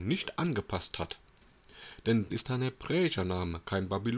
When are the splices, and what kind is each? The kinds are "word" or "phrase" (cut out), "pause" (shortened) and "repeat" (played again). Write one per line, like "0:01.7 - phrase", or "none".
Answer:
0:02.3 - word